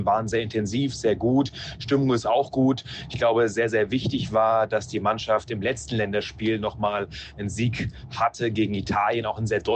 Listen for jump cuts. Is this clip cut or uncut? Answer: uncut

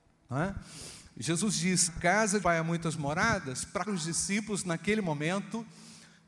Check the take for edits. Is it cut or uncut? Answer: cut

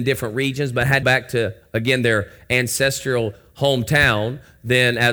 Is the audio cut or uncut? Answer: cut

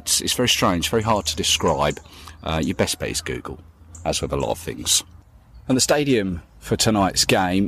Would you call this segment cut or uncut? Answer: uncut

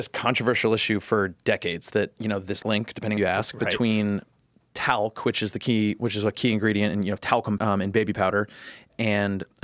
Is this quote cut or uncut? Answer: cut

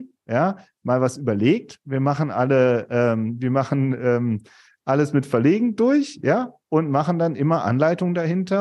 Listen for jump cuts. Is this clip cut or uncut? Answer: uncut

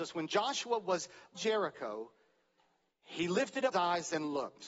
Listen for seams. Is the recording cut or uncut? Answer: cut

